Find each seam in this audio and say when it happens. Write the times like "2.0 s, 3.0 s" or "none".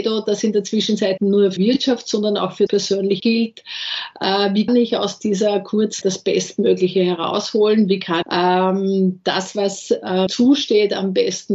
1.2 s, 1.6 s, 2.7 s, 3.2 s, 4.7 s, 6.0 s, 8.2 s, 10.3 s